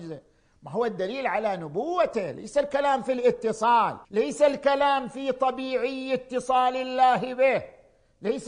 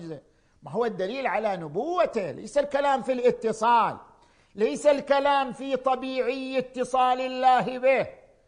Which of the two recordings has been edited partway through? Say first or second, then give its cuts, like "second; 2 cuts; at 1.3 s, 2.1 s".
first; 1 cut; at 4.0 s